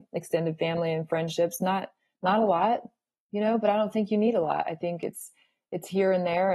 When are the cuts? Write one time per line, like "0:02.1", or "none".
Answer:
none